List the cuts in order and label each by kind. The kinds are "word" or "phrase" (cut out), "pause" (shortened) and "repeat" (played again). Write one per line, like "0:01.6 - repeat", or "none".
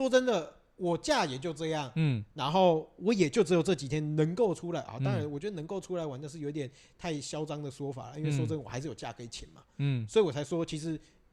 none